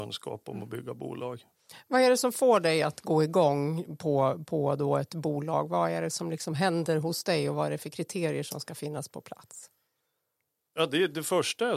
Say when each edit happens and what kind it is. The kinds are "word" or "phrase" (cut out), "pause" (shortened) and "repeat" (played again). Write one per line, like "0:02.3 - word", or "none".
none